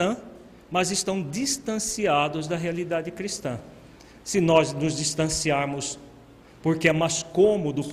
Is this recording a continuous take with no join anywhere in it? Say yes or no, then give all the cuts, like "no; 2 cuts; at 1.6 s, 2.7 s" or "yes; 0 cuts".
yes; 0 cuts